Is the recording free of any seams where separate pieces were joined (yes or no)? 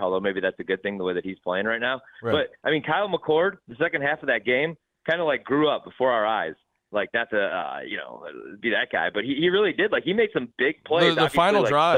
yes